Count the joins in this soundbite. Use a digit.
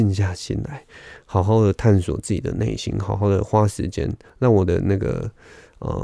0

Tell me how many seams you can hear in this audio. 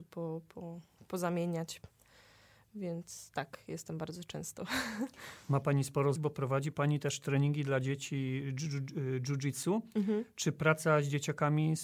1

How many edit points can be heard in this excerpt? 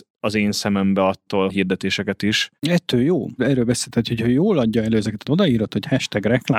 2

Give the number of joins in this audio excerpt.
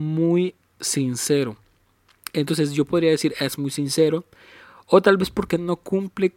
0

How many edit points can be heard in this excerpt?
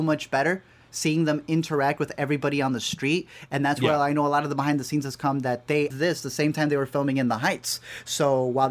1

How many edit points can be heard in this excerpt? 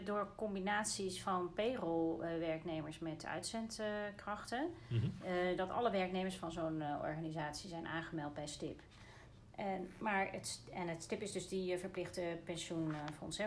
0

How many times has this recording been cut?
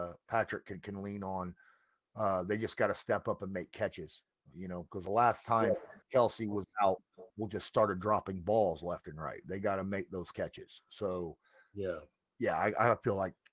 2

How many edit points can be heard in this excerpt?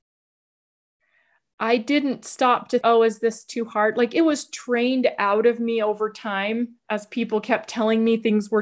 1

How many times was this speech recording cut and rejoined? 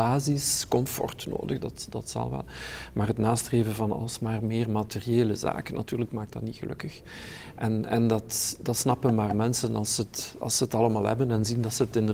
0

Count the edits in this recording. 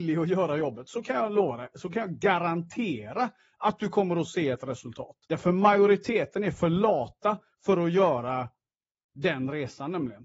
1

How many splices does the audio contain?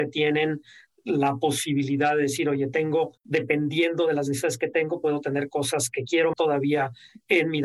2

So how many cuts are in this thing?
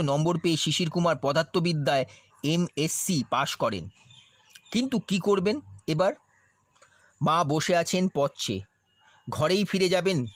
0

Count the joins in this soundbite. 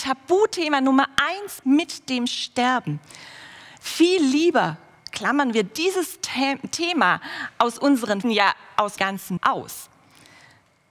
4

